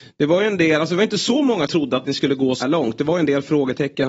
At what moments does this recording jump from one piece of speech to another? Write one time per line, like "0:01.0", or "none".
0:01.7
0:02.6